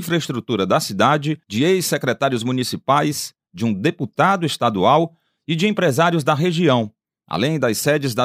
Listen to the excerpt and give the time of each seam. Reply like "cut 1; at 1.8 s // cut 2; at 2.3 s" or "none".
cut 1; at 1.4 s